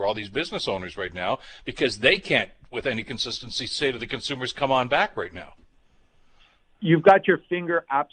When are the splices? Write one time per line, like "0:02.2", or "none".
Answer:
none

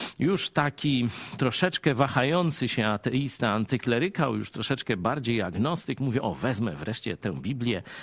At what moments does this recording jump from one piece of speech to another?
none

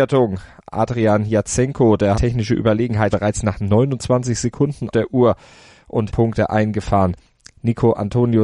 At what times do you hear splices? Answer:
0:02.1
0:03.1
0:04.9
0:06.1

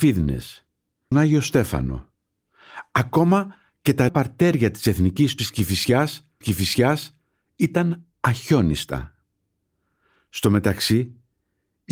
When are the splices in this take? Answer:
0:01.1
0:04.1
0:05.4
0:06.4

